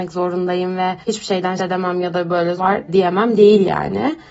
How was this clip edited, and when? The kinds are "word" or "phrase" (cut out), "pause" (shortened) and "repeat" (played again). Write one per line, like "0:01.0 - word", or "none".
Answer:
0:01.0 - pause
0:01.6 - word
0:02.6 - word
0:02.9 - word